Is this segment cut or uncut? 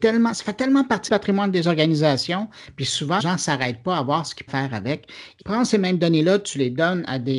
cut